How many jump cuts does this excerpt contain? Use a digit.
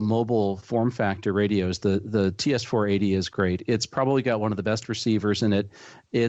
0